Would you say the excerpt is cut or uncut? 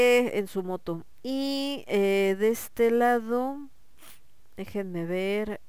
uncut